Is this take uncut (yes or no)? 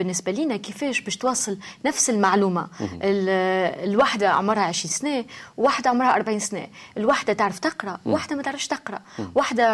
yes